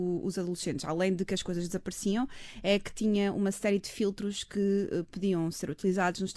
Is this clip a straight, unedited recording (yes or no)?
yes